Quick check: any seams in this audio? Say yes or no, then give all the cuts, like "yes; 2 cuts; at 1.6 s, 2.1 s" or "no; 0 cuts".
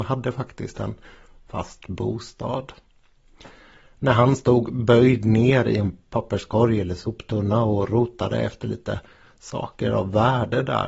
no; 0 cuts